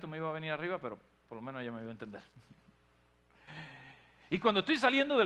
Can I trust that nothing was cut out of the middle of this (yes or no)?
yes